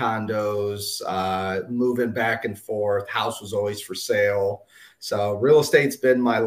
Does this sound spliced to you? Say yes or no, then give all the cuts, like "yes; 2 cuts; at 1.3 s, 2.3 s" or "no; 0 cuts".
no; 0 cuts